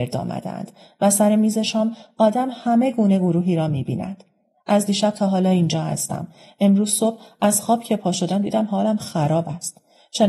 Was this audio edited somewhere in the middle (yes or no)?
no